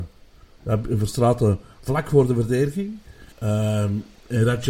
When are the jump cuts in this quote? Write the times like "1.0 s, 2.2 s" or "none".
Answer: 3.3 s